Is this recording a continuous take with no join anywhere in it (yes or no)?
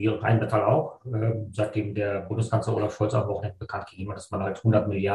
yes